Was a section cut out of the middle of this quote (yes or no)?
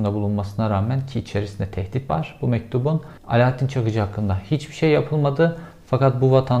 yes